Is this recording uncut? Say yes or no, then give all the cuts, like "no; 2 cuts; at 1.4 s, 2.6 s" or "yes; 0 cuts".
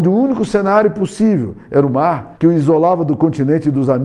no; 1 cut; at 2.4 s